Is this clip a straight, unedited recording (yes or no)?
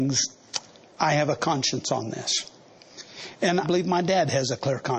no